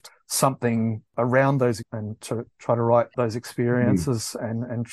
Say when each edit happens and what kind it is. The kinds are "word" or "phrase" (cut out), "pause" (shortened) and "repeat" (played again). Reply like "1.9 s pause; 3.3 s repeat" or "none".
1.8 s word; 3.1 s phrase

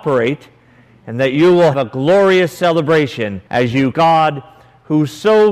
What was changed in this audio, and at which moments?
1.7 s word; 3.5 s pause; 3.9 s phrase

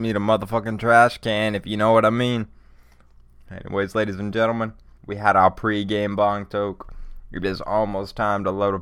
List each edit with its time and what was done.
5.0 s pause

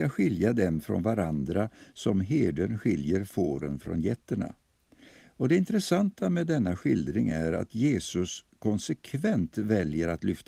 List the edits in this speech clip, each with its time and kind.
none

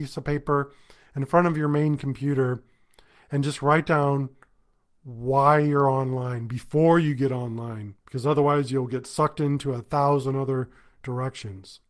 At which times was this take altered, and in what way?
8.0 s pause

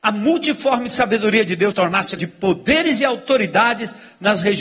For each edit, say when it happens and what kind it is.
1.7 s word; 2.2 s word

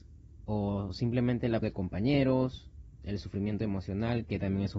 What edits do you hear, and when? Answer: 1.6 s word

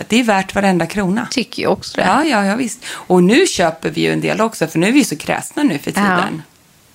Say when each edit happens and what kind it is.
none

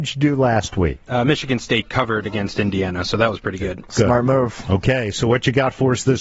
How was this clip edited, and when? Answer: none

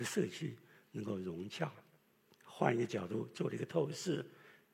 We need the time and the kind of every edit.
none

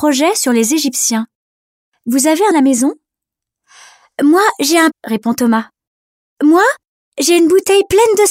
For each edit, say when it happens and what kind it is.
2.5 s phrase; 4.9 s word

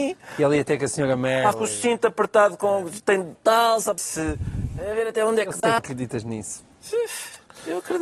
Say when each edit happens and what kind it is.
1.5 s word; 3.3 s phrase; 4.0 s word; 5.8 s phrase

